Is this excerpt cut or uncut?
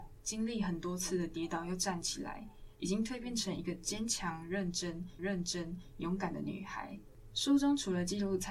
cut